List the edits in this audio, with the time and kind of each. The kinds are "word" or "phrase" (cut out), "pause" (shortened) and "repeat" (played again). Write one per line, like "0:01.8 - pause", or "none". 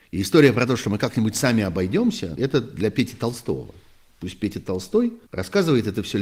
0:02.4 - word
0:05.3 - pause